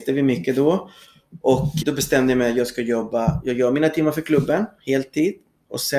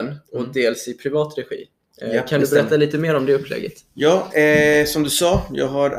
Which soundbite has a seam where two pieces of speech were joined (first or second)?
first